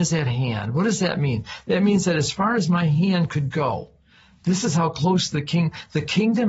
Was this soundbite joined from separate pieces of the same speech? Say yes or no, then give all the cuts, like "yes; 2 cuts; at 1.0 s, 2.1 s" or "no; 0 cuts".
no; 0 cuts